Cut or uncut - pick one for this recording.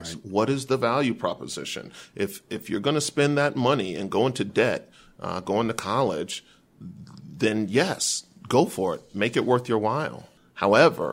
uncut